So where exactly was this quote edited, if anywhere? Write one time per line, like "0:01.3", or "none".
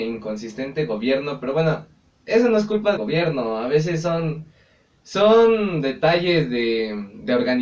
0:03.0